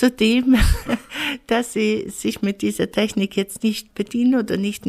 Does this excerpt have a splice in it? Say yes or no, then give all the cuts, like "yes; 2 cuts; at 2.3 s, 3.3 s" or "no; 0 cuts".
yes; 1 cut; at 3.9 s